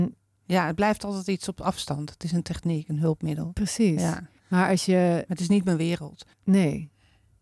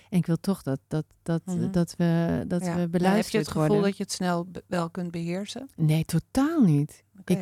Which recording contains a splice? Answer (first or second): first